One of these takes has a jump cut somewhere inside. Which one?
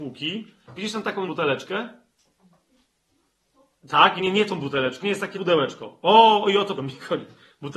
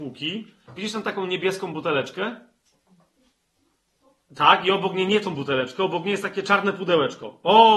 first; 5 cuts; at 1.3 s, 4.2 s, 5.0 s, 5.3 s, 6.8 s

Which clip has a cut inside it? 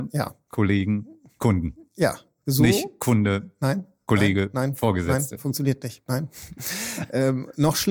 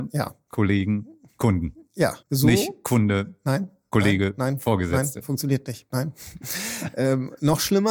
second; 1 cut; at 2.2 s

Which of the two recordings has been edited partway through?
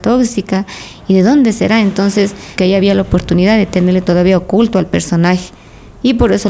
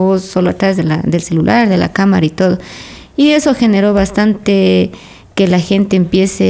first; 1 cut; at 2.6 s

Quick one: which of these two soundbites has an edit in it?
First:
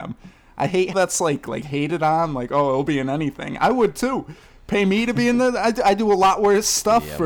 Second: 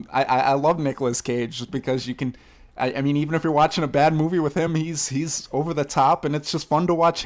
first; 1 cut; at 0.9 s

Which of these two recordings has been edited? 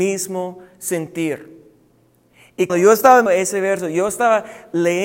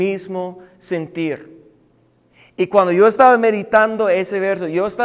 first; 2 cuts; at 2.7 s, 3.3 s

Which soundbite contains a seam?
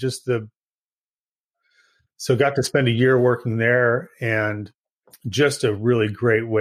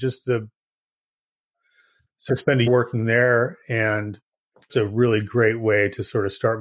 second; 3 cuts; at 2.3 s, 2.7 s, 4.7 s

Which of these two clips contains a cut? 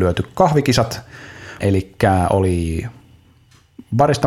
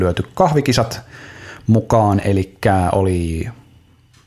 first; 1 cut; at 1.6 s

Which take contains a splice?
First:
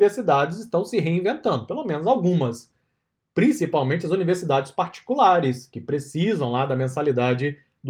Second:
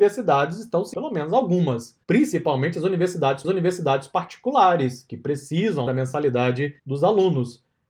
second; 5 cuts; at 0.9 s, 2.0 s, 3.4 s, 5.9 s, 6.8 s

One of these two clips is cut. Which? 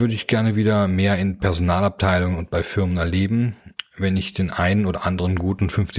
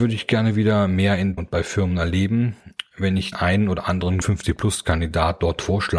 second; 3 cuts; at 1.4 s, 3.3 s, 4.2 s

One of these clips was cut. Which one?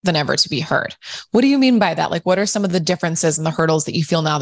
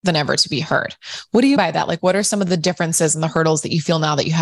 second; 1 cut; at 1.6 s

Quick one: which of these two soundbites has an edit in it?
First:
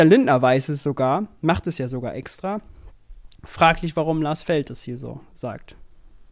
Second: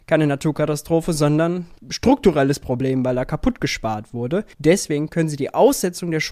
second; 2 cuts; at 1.8 s, 4.5 s

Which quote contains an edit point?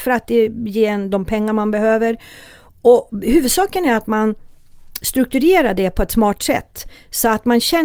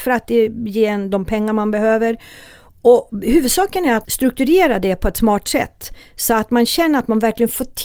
second; 1 cut; at 4.0 s

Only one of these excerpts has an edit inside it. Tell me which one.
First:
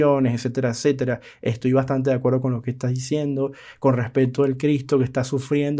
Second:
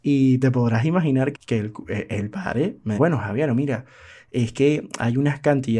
second; 2 cuts; at 1.3 s, 3.0 s

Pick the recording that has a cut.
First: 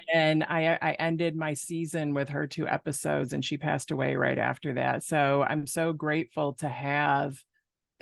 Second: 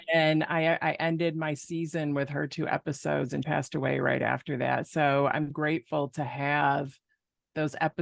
second; 2 cuts; at 3.4 s, 5.5 s

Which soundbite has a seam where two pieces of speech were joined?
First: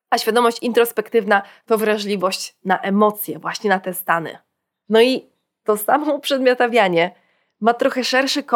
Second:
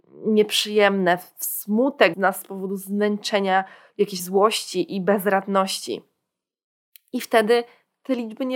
second; 2 cuts; at 2.1 s, 4.2 s

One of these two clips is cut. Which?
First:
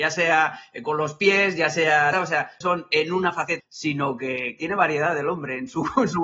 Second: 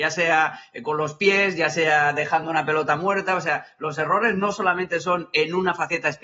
first; 3 cuts; at 2.1 s, 2.6 s, 3.6 s

